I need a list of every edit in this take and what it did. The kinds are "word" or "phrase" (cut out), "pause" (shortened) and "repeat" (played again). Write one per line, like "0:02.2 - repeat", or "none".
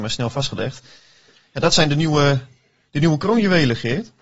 none